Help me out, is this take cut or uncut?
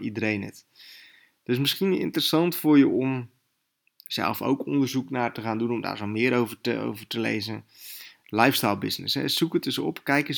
uncut